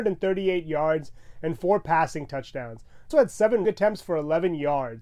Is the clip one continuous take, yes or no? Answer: no